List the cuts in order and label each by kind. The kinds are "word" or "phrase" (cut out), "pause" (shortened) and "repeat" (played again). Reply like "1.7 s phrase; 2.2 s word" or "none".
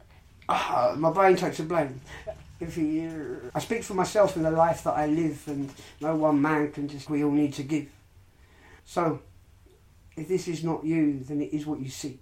3.5 s word; 7.1 s word; 8.8 s pause